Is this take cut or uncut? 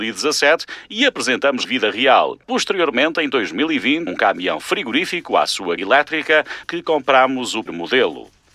cut